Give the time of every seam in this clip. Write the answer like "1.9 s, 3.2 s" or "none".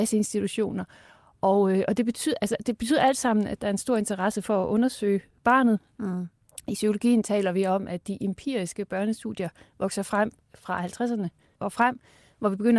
11.6 s